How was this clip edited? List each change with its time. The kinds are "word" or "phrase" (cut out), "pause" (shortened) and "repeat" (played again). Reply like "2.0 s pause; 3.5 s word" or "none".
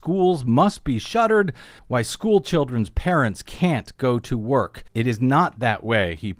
1.8 s pause; 4.9 s pause